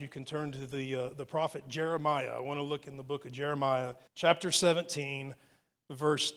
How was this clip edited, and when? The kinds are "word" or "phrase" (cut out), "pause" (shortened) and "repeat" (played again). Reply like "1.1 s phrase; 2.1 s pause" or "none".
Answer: 4.1 s pause

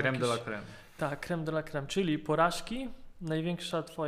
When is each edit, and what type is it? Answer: none

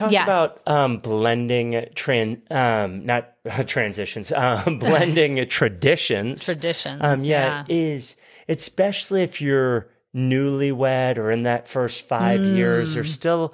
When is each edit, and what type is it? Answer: none

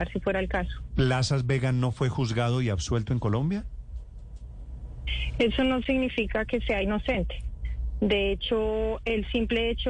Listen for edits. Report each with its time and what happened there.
none

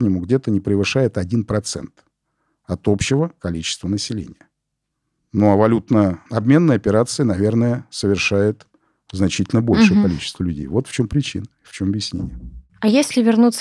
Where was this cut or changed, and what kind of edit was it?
none

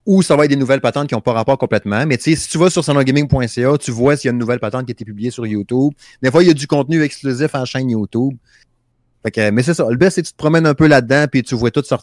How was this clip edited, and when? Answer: none

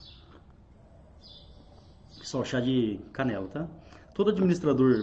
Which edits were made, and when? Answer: none

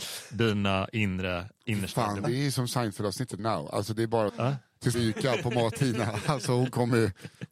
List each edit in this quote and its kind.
2.2 s word; 3.4 s word; 4.3 s word; 4.9 s phrase

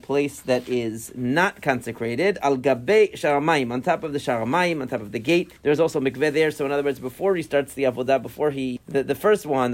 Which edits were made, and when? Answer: 5.6 s pause; 8.8 s word

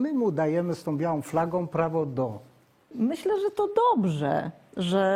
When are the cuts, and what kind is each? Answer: none

